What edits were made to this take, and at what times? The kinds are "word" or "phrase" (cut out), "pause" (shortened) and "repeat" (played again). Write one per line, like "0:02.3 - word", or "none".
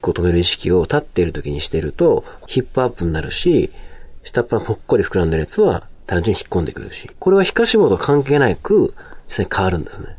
0:06.0 - pause
0:07.1 - pause